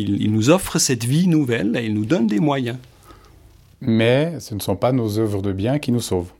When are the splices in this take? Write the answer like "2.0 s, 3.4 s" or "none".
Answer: none